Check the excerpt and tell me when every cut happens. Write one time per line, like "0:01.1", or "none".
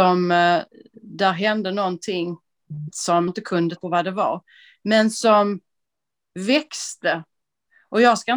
0:02.9
0:03.3
0:03.8